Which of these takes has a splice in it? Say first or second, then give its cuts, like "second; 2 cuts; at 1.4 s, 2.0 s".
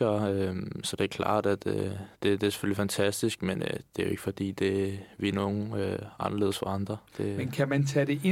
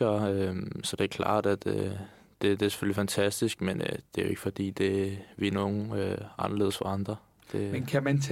first; 2 cuts; at 2.1 s, 7.1 s